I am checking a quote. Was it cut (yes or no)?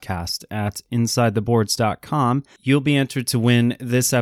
no